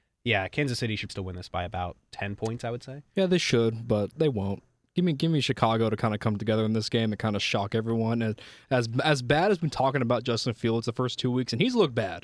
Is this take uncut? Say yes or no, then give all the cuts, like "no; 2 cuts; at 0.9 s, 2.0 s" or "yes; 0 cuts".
no; 1 cut; at 1.1 s